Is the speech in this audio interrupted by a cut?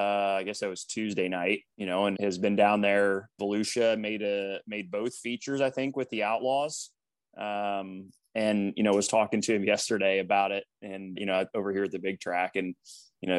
yes; 4 cuts; at 1.7 s, 2.2 s, 3.4 s, 11.2 s

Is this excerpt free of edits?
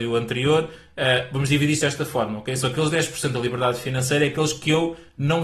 yes; 0 cuts

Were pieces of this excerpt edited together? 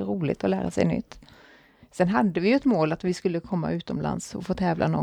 no; 0 cuts

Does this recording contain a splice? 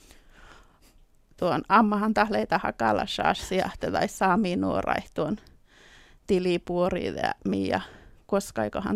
no; 0 cuts

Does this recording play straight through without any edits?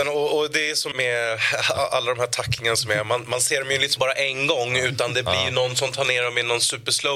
no; 2 cuts; at 0.9 s, 4.0 s

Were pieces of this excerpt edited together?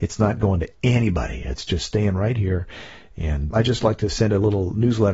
yes; 1 cut; at 3.5 s

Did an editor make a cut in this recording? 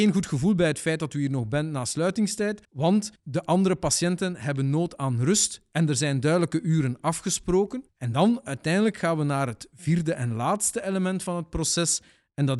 yes; 1 cut; at 2.6 s

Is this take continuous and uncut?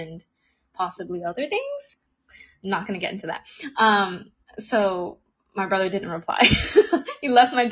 yes; 0 cuts

